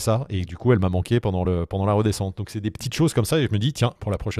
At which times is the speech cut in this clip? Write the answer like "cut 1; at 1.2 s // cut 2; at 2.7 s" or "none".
none